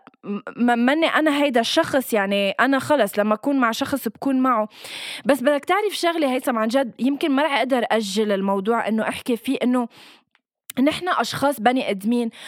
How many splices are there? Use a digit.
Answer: 0